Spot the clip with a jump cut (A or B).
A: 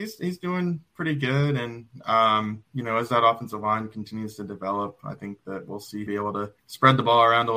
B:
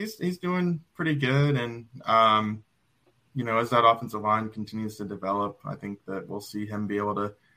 A